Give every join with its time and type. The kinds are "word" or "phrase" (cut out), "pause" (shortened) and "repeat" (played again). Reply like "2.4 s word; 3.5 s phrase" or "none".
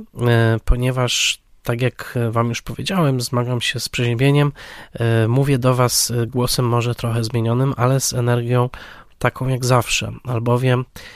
none